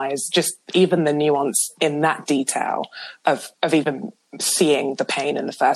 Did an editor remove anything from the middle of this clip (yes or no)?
no